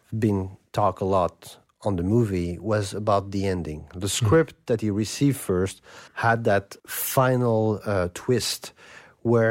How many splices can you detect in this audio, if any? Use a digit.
2